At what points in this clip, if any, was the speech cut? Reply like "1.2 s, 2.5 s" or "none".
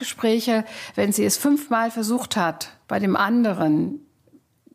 2.8 s